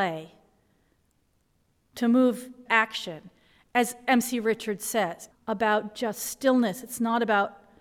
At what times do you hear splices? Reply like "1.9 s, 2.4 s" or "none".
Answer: 2.7 s, 5.3 s

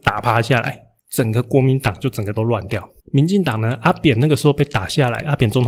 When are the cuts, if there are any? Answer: 1.0 s, 3.0 s

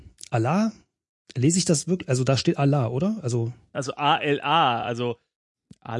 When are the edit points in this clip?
none

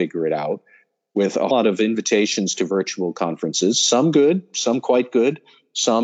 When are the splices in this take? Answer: 1.5 s

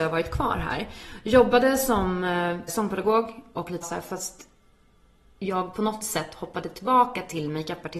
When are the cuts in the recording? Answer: 2.7 s, 3.8 s

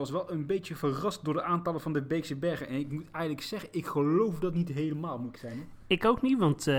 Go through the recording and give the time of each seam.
5.4 s

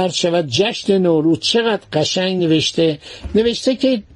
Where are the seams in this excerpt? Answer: none

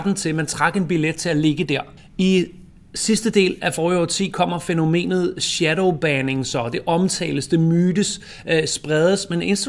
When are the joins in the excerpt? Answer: 2.0 s

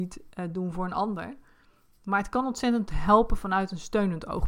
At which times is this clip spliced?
none

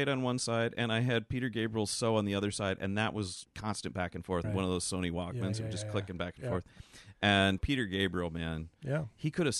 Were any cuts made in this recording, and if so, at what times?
3.4 s, 4.4 s, 7.6 s

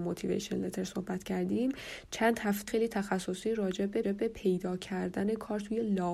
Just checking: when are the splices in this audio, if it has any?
2.7 s, 4.0 s

